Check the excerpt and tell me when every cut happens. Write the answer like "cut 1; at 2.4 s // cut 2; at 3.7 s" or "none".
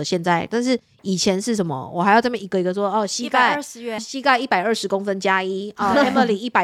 cut 1; at 4.0 s